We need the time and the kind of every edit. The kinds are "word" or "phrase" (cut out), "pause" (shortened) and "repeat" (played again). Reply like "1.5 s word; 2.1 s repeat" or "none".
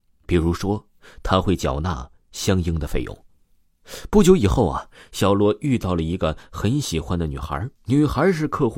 7.8 s pause